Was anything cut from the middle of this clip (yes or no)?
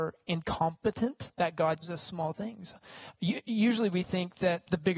yes